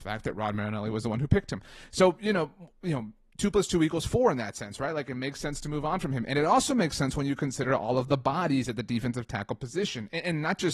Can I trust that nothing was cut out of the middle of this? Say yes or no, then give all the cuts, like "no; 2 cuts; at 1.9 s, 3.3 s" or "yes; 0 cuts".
yes; 0 cuts